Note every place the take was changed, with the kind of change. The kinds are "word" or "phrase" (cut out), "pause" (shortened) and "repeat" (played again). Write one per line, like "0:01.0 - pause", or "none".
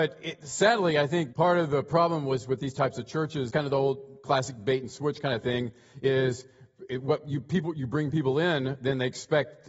0:01.3 - word
0:03.5 - word